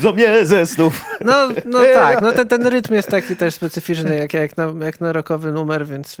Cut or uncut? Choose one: uncut